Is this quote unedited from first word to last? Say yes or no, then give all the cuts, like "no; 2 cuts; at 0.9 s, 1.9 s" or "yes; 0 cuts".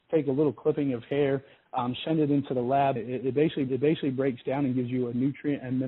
no; 2 cuts; at 3.0 s, 3.7 s